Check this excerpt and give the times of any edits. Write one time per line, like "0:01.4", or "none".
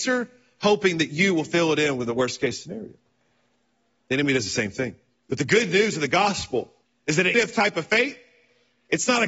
0:05.2
0:06.8
0:07.3